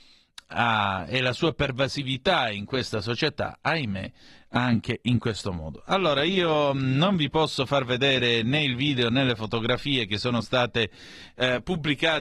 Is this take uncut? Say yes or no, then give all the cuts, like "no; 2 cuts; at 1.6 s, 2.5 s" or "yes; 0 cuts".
yes; 0 cuts